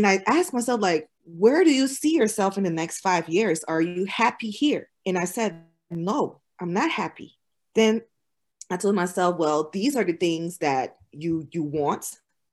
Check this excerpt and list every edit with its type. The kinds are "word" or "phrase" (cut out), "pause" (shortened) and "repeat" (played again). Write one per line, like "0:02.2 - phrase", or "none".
0:01.2 - pause
0:04.9 - pause
0:07.5 - pause